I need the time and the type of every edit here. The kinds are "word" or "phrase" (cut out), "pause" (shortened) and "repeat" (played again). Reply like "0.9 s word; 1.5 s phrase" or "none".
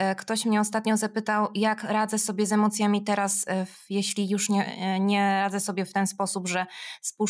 none